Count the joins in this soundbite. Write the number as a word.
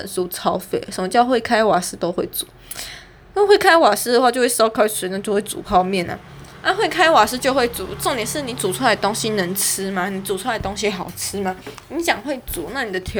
zero